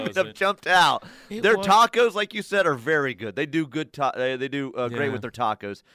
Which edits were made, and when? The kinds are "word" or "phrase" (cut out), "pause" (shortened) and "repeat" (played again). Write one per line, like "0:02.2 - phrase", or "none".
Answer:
none